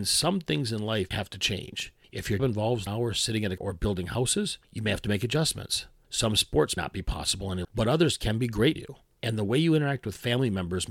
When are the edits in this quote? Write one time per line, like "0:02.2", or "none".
0:01.1
0:02.4
0:02.9
0:03.6
0:06.8
0:07.6
0:08.8

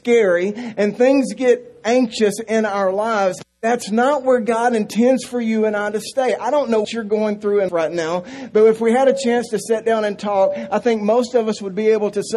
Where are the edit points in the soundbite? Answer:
0:06.8
0:07.7

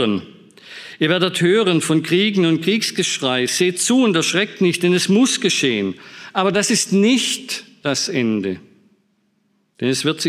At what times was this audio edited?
none

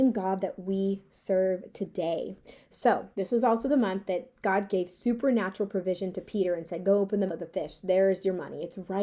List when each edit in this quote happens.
0:03.1
0:07.3

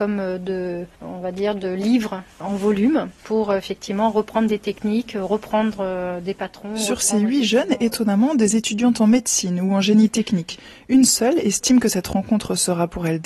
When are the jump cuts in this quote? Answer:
0:00.9
0:03.2

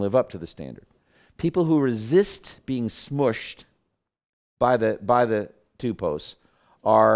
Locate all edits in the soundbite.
none

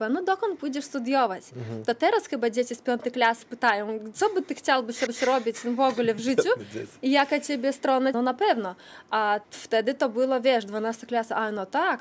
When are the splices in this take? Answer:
0:03.4
0:05.1
0:08.1
0:09.4

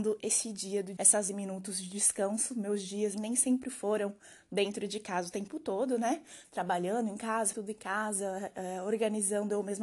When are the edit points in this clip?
0:01.0
0:01.3
0:03.1
0:07.5

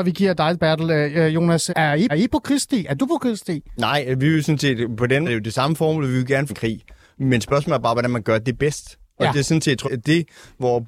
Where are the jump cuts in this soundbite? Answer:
0:01.7
0:02.1
0:05.3
0:06.5
0:09.8

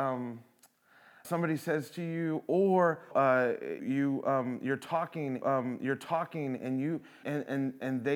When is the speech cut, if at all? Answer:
0:01.2
0:03.1
0:03.8
0:05.4
0:07.2

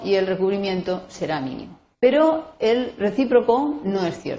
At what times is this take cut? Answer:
0:01.9

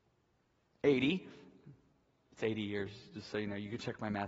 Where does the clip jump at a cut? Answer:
none

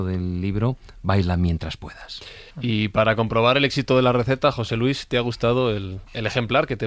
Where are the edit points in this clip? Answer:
0:02.5

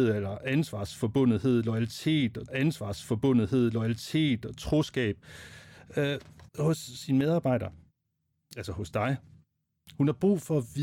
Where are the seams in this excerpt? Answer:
0:02.5
0:06.5

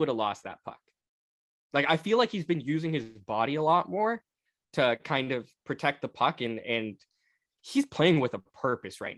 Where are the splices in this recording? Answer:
none

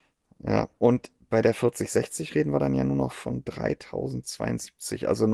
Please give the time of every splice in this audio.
none

